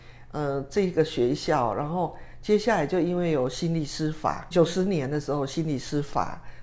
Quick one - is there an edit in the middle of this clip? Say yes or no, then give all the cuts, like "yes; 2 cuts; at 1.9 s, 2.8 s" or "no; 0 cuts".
yes; 1 cut; at 4.5 s